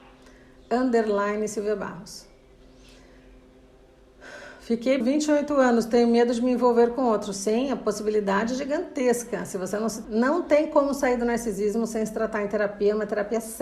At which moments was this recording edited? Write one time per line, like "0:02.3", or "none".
0:05.0
0:10.0

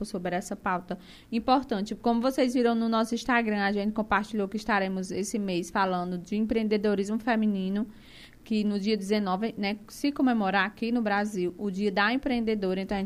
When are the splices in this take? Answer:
none

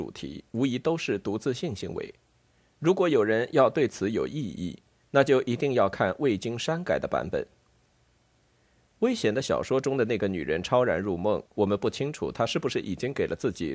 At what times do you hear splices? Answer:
0:11.5

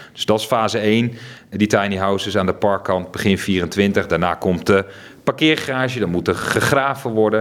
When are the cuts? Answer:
none

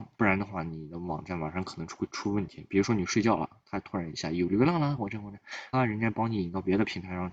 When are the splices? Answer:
0:05.7

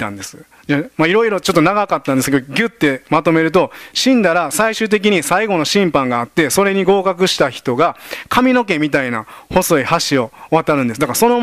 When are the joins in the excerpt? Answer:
none

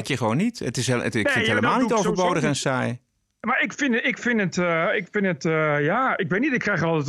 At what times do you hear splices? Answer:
none

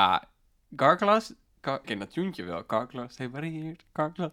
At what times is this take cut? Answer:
0:01.8

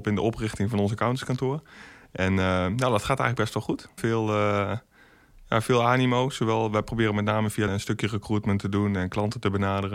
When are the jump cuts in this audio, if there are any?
0:04.0
0:07.7

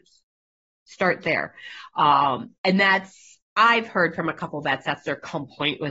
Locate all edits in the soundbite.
none

